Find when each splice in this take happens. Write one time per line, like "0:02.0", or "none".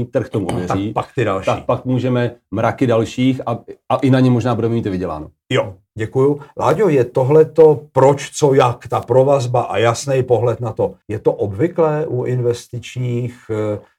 0:11.0